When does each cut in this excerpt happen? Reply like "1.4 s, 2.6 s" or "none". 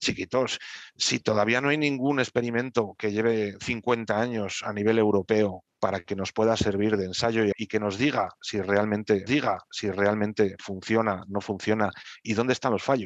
5.7 s, 7.5 s, 9.3 s